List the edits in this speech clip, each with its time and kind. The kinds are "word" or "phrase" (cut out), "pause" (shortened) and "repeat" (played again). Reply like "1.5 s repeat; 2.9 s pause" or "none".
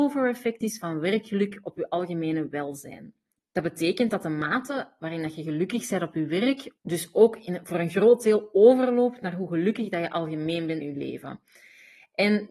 3.4 s pause; 6.8 s pause; 10.8 s word